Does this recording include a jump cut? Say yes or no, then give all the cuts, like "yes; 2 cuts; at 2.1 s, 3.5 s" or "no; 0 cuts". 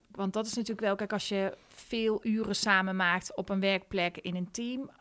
yes; 1 cut; at 1.6 s